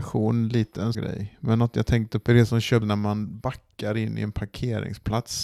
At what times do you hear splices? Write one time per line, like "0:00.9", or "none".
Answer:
0:00.9
0:02.3
0:02.8

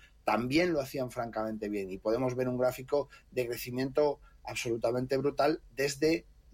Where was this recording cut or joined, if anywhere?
none

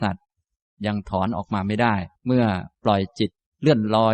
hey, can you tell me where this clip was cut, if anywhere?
0:02.2

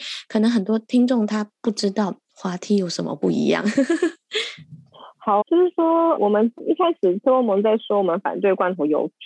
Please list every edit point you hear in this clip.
0:05.4
0:06.2

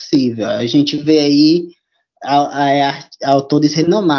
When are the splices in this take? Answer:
none

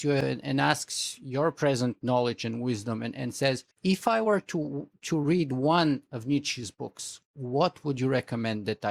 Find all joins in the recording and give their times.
0:03.7

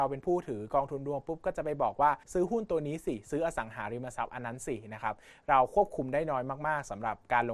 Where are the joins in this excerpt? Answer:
0:02.2

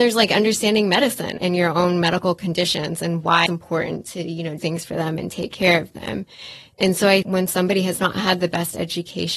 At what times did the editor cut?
0:01.4
0:03.5
0:04.6
0:07.2

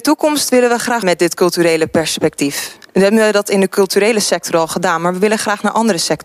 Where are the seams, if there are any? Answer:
0:01.0
0:02.9

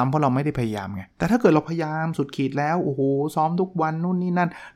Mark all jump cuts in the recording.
0:01.1

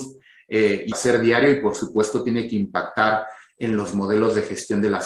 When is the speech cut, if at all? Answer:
0:00.9

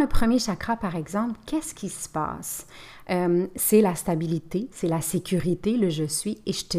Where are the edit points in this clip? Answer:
none

